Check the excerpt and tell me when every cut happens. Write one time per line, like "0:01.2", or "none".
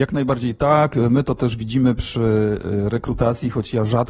none